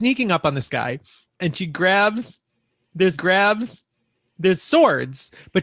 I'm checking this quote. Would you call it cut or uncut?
cut